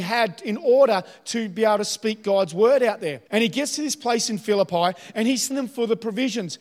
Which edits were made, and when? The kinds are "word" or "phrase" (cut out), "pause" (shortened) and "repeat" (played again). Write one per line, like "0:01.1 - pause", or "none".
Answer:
0:03.3 - pause
0:05.5 - word